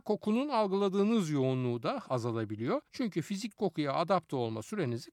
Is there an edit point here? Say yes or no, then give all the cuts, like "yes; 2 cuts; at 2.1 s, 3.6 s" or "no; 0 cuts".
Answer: yes; 3 cuts; at 2.0 s, 2.9 s, 3.6 s